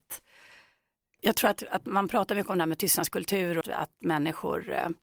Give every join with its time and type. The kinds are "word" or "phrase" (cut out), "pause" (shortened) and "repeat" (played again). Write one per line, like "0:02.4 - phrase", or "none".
0:03.6 - word